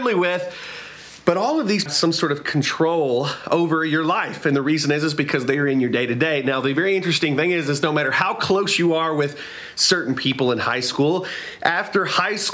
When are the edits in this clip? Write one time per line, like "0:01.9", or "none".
0:01.9